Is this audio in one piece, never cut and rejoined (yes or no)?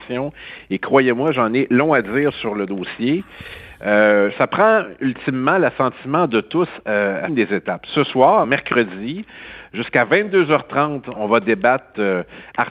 no